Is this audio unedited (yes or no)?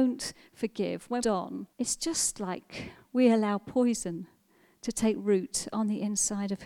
no